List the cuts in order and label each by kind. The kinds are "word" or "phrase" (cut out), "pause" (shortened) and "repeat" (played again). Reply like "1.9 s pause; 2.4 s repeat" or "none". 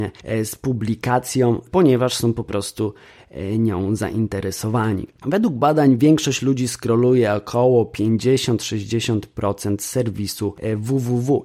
none